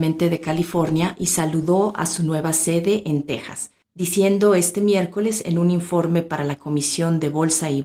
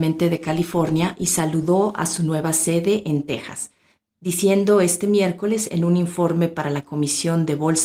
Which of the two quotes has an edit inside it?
first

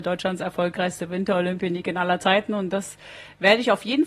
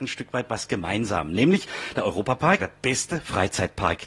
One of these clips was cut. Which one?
second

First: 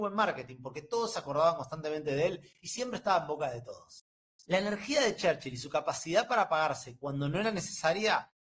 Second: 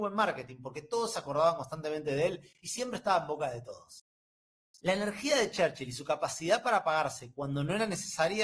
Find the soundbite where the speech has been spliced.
first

